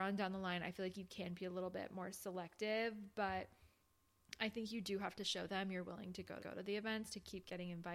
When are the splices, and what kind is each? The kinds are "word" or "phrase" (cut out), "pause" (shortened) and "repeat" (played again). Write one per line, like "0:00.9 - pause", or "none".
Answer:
0:06.4 - repeat